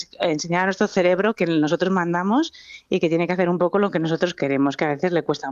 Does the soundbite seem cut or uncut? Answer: uncut